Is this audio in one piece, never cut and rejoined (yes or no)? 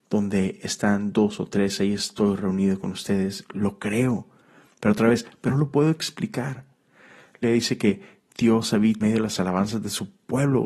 no